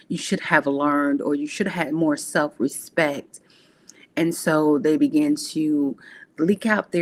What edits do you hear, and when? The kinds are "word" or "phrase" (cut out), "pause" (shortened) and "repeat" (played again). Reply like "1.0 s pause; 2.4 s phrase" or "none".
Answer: none